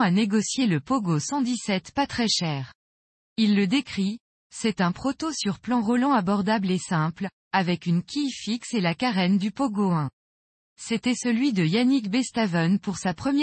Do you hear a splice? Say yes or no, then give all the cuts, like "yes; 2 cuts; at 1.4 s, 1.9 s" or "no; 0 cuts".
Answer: no; 0 cuts